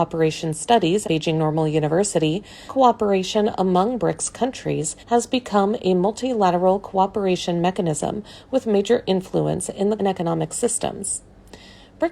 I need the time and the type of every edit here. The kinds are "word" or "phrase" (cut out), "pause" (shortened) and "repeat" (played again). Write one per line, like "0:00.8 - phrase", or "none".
0:01.0 - word
0:02.7 - phrase
0:05.0 - pause
0:10.0 - phrase